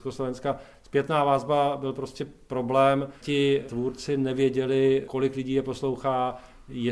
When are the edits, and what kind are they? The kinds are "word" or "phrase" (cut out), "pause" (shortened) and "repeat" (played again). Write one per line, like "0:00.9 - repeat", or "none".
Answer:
0:03.2 - pause